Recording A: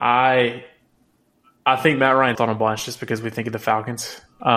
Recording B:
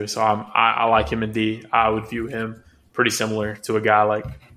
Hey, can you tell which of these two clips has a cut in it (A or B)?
A